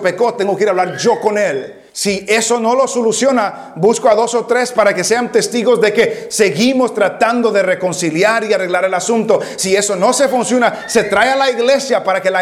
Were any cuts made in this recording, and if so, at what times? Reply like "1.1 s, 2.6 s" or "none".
1.9 s